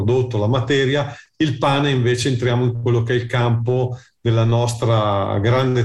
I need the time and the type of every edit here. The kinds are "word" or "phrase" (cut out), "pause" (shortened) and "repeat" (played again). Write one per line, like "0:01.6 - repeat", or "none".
none